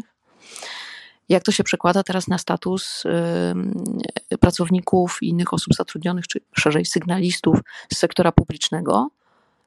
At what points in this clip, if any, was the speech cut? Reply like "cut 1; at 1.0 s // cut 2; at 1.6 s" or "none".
cut 1; at 6.5 s

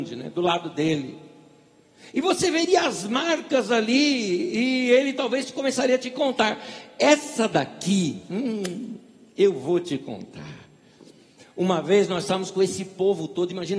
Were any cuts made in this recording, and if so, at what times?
none

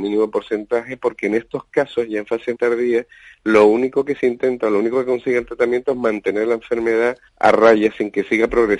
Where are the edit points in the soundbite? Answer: cut 1; at 2.5 s // cut 2; at 7.3 s

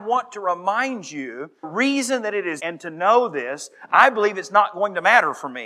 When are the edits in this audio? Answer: cut 1; at 1.6 s // cut 2; at 2.6 s

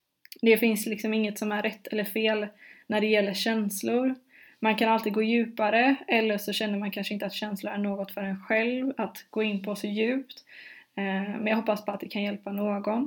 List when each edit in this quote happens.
none

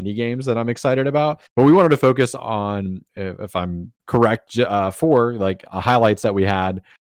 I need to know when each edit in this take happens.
cut 1; at 1.5 s // cut 2; at 3.1 s // cut 3; at 3.9 s

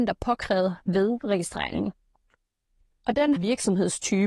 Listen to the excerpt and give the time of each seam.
cut 1; at 3.4 s

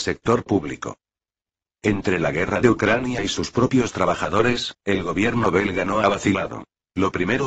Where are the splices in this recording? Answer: none

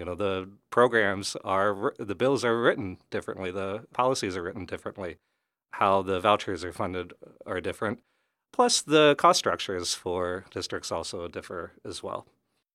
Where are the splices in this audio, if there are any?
cut 1; at 10.5 s

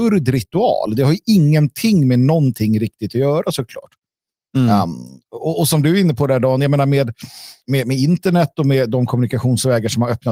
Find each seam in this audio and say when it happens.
cut 1; at 7.6 s

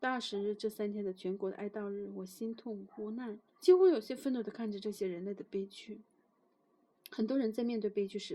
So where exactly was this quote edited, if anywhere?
cut 1; at 3.5 s

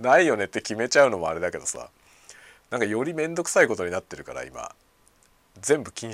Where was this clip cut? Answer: none

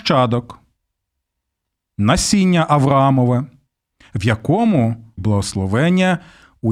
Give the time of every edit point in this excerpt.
cut 1; at 5.2 s

